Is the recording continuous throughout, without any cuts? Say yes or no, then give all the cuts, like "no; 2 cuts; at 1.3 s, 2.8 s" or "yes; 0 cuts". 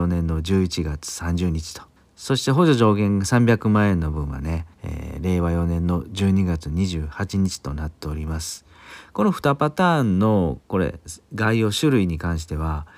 no; 2 cuts; at 2.0 s, 4.7 s